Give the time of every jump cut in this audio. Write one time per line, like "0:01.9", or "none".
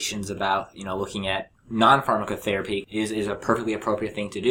none